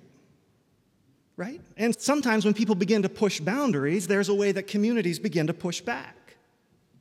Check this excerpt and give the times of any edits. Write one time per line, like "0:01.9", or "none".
0:01.9